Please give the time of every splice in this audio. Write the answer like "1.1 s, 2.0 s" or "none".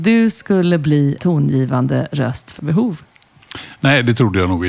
1.2 s, 2.6 s